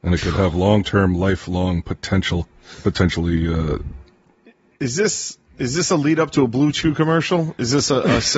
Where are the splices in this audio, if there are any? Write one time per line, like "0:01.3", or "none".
none